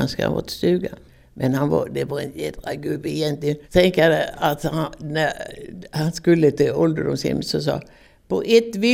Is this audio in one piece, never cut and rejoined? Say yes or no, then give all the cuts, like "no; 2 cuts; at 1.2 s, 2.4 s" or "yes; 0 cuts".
no; 2 cuts; at 1.1 s, 3.6 s